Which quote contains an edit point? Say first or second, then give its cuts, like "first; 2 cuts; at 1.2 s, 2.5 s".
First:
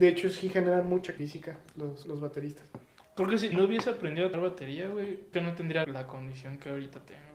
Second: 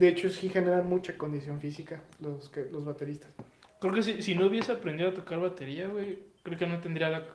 first; 6 cuts; at 1.2 s, 2.0 s, 3.5 s, 4.3 s, 5.3 s, 5.8 s